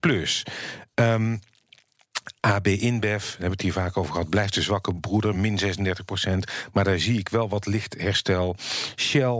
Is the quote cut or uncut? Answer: uncut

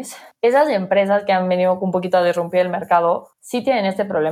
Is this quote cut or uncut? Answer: cut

